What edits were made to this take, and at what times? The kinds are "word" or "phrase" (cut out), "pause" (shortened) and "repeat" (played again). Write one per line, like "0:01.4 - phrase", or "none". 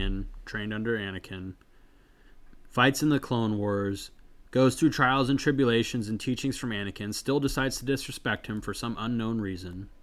0:04.5 - pause